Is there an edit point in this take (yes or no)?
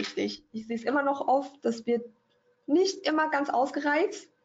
no